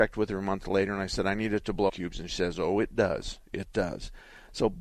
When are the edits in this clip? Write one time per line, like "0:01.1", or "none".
0:01.9
0:02.3